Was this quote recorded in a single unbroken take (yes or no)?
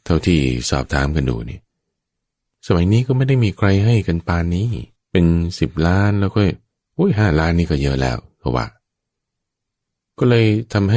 no